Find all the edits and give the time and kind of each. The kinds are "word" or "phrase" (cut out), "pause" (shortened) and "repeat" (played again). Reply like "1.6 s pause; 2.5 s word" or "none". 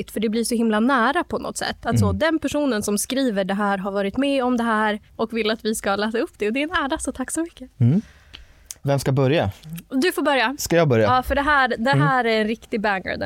5.1 s pause; 7.7 s pause